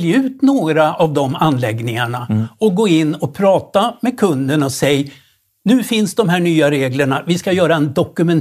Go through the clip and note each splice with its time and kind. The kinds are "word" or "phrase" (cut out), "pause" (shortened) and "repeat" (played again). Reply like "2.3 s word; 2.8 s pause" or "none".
none